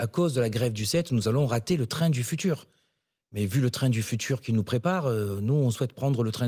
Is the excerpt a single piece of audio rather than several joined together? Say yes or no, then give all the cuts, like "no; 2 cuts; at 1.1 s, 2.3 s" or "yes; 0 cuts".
yes; 0 cuts